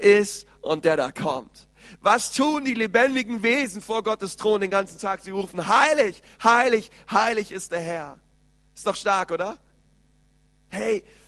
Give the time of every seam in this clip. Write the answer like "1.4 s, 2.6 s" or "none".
none